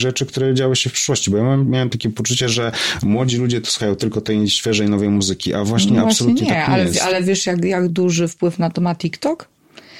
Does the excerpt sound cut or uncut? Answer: uncut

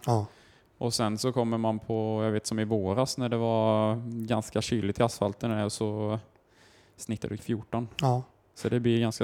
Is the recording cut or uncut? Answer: cut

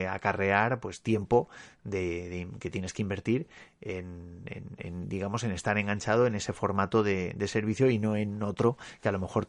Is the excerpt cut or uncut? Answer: uncut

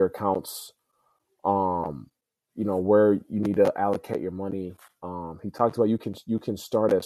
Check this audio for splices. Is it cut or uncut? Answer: uncut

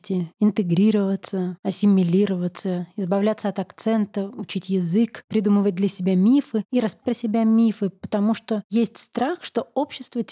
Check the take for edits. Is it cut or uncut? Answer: cut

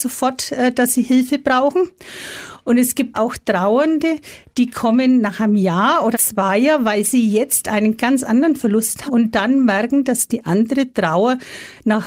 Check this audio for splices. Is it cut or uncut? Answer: cut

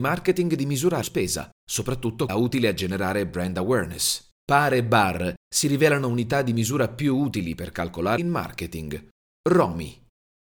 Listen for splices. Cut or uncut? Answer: cut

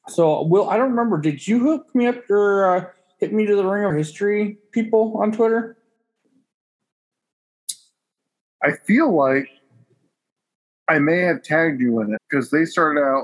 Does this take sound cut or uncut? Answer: cut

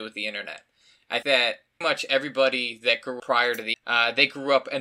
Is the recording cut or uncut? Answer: cut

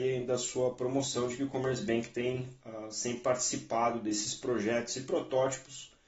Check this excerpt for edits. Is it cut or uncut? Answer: uncut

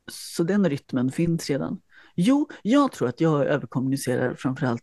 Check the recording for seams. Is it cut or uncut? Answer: uncut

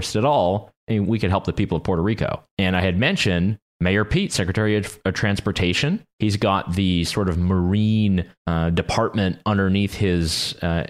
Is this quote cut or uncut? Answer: cut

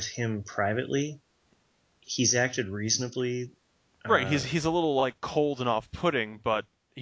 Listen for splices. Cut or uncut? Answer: uncut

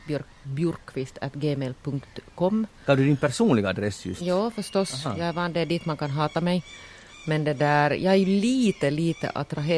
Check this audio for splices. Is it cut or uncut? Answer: uncut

